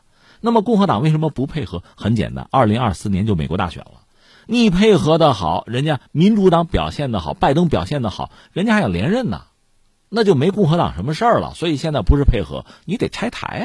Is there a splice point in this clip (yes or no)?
yes